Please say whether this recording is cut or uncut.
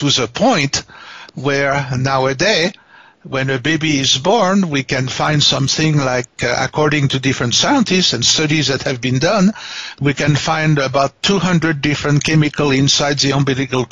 uncut